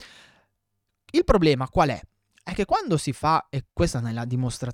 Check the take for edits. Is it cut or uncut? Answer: uncut